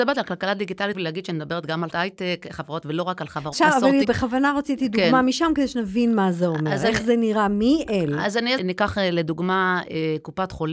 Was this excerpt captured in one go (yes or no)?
no